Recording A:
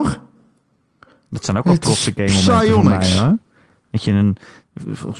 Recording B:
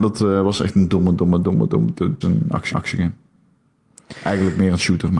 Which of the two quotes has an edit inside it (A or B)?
B